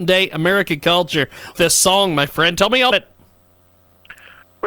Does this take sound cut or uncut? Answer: cut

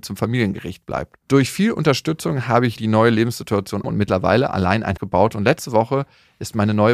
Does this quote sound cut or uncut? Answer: cut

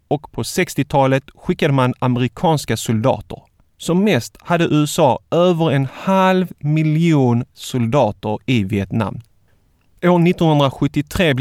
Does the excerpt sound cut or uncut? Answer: uncut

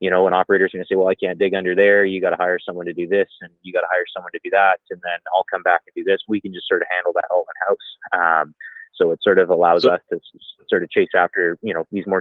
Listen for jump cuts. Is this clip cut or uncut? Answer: uncut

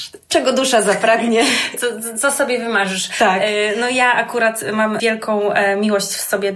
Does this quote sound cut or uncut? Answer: uncut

